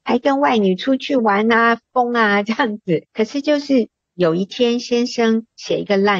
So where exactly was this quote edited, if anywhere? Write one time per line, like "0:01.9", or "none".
0:03.1

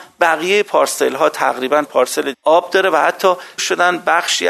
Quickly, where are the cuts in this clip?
0:01.8
0:02.3
0:03.6

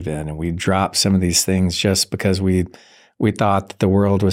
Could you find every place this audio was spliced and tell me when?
none

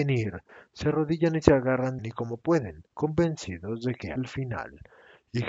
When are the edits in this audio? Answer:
0:02.0
0:02.9
0:04.2

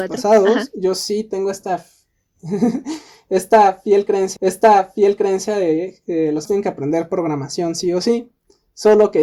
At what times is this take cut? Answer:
0:04.4
0:06.5

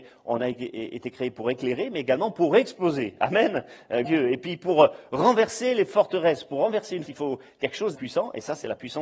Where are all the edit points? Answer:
0:04.0
0:07.1
0:07.9

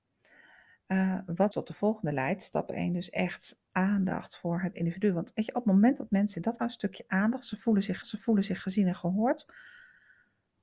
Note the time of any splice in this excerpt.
0:01.5
0:03.7
0:04.7
0:06.6
0:08.0

